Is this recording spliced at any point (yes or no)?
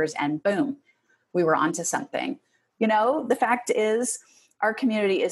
no